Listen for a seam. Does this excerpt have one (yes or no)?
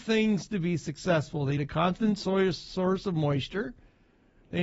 yes